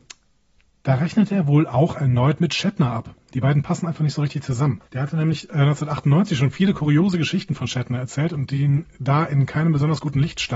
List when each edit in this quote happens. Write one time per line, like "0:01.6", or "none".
0:04.9